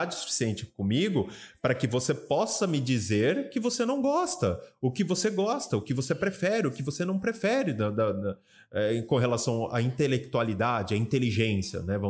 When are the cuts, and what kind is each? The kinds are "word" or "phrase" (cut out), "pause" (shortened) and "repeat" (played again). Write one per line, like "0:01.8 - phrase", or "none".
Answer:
none